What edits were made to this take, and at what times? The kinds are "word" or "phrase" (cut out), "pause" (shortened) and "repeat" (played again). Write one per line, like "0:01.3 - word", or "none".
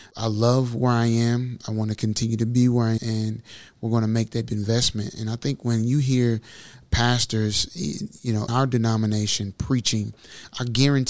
0:03.0 - word
0:04.5 - word
0:08.5 - word